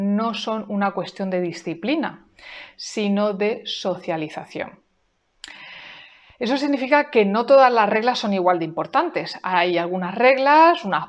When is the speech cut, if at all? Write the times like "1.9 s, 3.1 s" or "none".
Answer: none